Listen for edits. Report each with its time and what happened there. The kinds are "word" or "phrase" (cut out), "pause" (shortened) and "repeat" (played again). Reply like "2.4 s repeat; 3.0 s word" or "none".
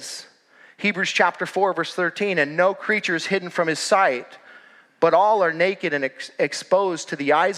none